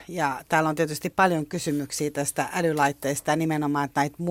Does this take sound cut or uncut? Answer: uncut